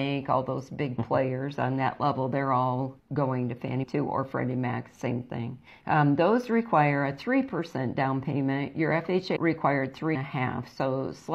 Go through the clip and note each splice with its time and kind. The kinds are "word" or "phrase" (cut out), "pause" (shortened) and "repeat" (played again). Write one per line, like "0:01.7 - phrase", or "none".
0:03.0 - pause
0:03.8 - word
0:05.7 - pause
0:09.4 - word
0:10.1 - word